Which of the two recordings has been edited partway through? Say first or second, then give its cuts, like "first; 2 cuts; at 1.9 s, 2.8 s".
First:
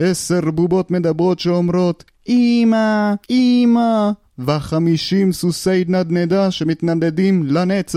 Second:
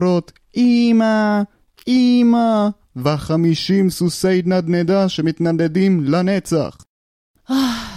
first; 1 cut; at 3.2 s